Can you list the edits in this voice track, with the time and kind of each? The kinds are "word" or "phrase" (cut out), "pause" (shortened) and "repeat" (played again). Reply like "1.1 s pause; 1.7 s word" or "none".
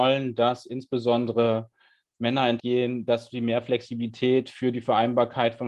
2.6 s word

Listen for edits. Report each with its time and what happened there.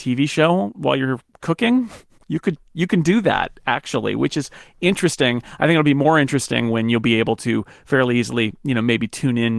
none

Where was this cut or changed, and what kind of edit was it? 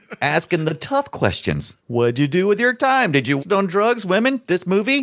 1.8 s pause; 3.4 s word

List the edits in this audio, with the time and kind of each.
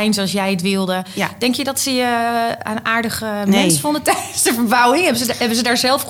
none

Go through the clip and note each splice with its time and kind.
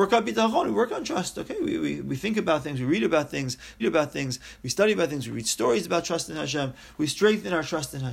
3.8 s repeat

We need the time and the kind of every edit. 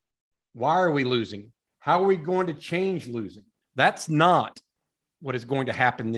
3.6 s pause

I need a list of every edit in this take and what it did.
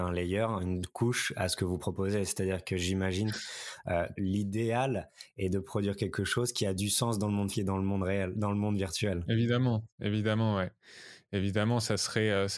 4.2 s word; 7.5 s word; 9.9 s pause

